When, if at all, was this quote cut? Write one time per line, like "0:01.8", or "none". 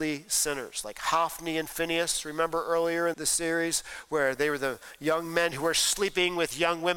0:03.1